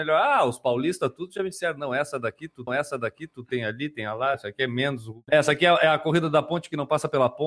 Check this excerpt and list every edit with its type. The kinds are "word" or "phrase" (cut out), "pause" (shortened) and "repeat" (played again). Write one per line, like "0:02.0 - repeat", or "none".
0:02.7 - repeat
0:04.3 - word